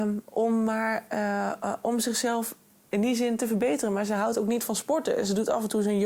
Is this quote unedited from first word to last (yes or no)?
yes